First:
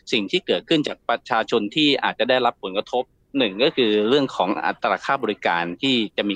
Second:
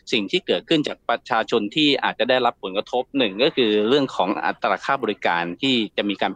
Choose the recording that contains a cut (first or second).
second